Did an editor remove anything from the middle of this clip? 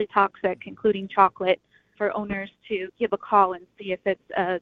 yes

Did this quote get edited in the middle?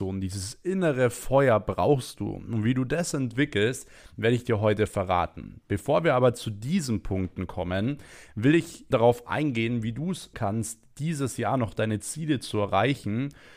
yes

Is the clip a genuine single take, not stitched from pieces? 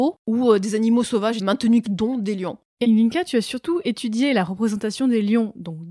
no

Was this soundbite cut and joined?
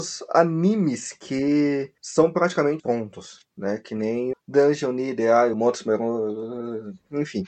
yes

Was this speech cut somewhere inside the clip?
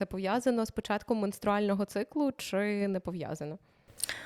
no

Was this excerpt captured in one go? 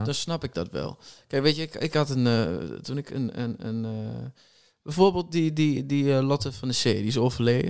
yes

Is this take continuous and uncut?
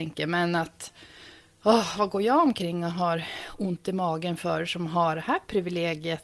yes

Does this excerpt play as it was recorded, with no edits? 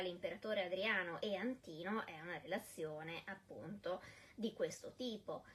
yes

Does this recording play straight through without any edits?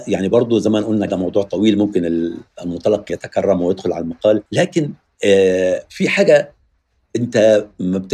no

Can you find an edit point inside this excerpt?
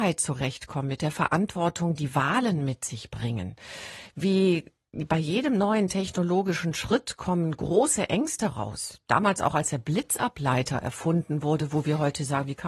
no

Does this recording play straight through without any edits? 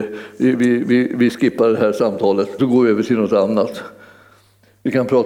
no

